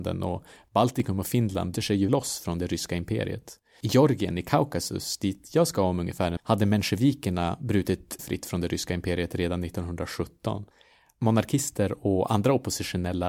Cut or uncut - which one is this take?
cut